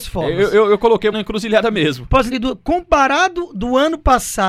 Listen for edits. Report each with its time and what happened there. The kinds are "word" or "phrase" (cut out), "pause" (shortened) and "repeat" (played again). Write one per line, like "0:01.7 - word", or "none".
0:01.1 - word
0:02.3 - word